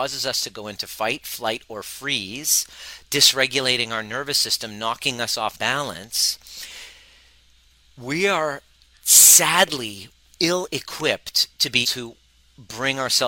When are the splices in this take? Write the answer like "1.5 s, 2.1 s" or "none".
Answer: 5.5 s, 11.8 s